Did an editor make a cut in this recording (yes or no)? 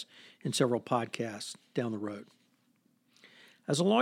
no